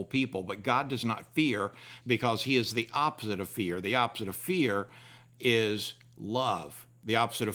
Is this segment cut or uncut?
cut